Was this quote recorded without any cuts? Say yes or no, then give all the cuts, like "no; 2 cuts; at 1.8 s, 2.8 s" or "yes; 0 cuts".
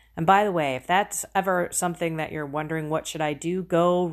yes; 0 cuts